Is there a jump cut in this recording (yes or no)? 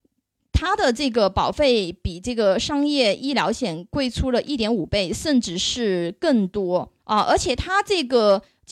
yes